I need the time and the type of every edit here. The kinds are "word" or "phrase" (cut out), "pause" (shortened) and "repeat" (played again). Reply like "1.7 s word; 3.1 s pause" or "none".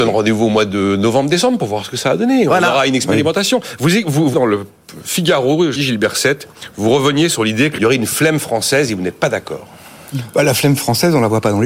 4.3 s word; 5.7 s word; 7.8 s word